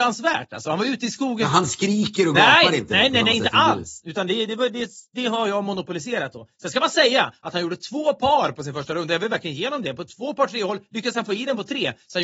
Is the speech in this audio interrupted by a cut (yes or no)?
no